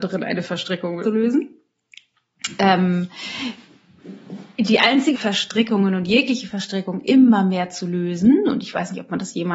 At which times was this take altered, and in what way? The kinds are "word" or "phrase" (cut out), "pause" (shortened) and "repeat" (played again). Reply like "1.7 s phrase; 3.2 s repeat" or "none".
1.0 s word; 5.1 s phrase